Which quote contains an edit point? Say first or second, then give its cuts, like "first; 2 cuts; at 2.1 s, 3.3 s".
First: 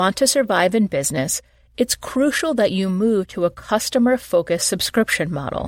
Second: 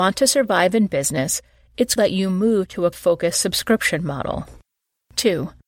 second; 2 cuts; at 2.0 s, 2.9 s